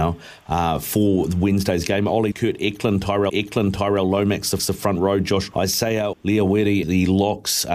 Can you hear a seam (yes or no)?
yes